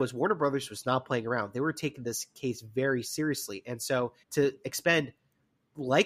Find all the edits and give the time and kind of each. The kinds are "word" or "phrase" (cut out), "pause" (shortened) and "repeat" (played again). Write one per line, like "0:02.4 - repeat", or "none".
0:04.2 - pause